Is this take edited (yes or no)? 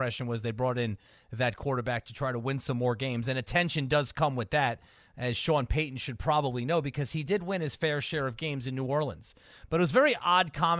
no